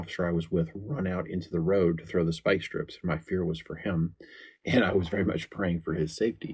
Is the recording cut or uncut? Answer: uncut